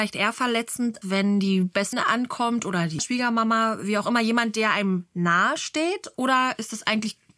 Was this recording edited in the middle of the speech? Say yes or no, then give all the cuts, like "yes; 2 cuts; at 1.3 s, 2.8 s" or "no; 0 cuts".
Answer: yes; 3 cuts; at 1.0 s, 1.9 s, 3.0 s